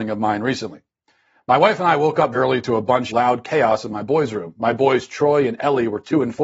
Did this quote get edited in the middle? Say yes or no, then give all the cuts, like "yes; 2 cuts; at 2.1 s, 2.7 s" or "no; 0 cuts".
yes; 2 cuts; at 2.3 s, 3.1 s